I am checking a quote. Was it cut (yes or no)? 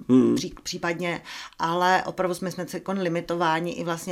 no